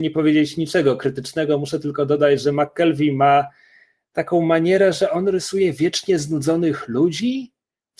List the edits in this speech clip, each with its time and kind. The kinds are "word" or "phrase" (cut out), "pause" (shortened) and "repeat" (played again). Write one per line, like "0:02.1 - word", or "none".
none